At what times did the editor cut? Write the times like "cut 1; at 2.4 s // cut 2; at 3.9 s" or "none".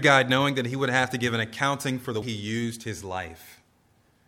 cut 1; at 2.2 s